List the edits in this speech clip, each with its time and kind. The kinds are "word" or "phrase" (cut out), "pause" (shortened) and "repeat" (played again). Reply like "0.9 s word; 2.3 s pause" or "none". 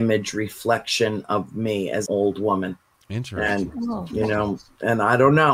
2.1 s word; 2.9 s pause